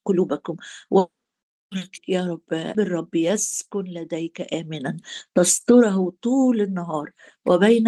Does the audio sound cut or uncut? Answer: cut